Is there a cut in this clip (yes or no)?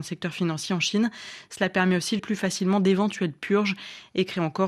yes